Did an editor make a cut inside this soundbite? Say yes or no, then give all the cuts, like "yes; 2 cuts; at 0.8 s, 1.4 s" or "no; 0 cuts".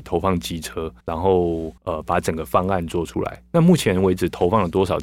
yes; 2 cuts; at 1.0 s, 1.8 s